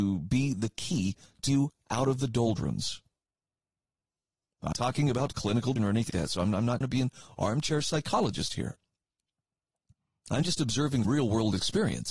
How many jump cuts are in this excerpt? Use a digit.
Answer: 6